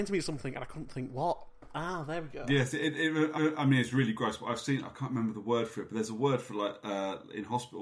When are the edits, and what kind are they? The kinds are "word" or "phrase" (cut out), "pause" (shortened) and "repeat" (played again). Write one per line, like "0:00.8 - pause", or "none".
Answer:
0:03.4 - repeat